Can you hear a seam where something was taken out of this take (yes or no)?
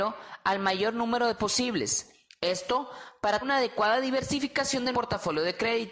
yes